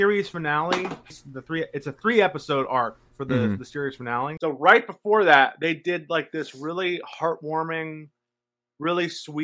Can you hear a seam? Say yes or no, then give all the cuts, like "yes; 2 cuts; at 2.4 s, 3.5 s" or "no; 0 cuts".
no; 0 cuts